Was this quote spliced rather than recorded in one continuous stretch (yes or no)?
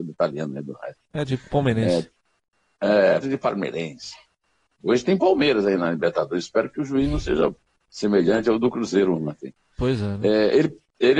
yes